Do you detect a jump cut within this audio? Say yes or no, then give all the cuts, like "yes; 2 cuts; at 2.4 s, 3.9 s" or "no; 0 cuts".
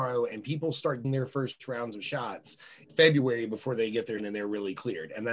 yes; 3 cuts; at 1.0 s, 2.9 s, 4.2 s